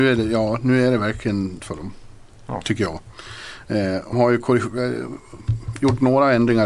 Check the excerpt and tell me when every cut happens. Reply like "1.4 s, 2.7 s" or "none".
1.6 s, 4.1 s